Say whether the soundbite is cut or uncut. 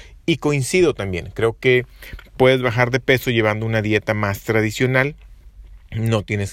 uncut